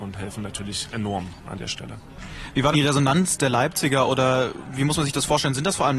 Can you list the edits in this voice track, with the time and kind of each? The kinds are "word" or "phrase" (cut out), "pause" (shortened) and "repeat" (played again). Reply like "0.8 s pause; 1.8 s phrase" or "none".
2.7 s word